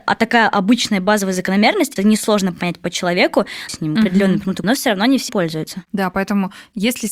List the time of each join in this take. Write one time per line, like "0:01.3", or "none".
0:02.0
0:03.7
0:04.6
0:05.3